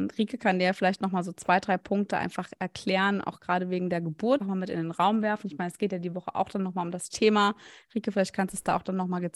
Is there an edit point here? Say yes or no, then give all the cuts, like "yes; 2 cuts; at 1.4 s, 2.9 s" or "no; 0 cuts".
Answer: yes; 1 cut; at 4.4 s